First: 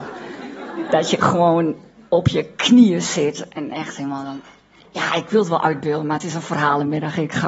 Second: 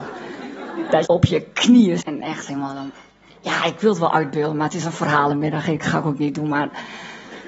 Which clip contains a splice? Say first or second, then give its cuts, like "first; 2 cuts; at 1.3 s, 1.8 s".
second; 2 cuts; at 1.0 s, 2.0 s